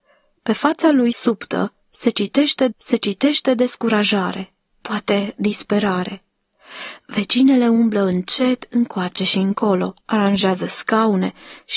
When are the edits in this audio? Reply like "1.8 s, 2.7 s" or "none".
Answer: 2.7 s, 10.0 s